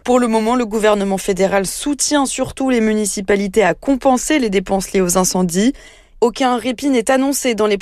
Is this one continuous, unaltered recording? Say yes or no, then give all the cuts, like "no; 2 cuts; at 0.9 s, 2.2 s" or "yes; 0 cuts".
yes; 0 cuts